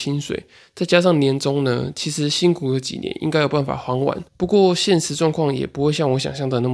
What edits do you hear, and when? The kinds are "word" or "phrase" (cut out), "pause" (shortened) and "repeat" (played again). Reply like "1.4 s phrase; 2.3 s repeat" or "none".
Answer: 4.3 s pause